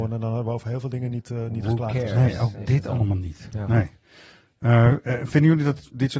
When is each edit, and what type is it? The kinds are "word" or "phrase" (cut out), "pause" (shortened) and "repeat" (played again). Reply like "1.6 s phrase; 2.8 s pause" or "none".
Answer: none